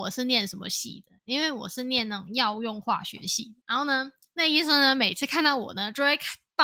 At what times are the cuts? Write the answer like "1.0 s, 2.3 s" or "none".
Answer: 3.6 s